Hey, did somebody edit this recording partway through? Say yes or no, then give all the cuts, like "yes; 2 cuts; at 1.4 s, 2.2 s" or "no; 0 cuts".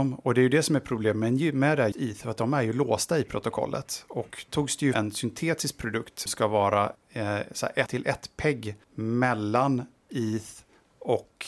yes; 7 cuts; at 1.9 s, 4.5 s, 4.9 s, 6.3 s, 6.9 s, 7.9 s, 8.8 s